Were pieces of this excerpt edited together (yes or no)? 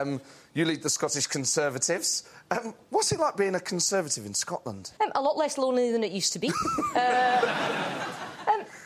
yes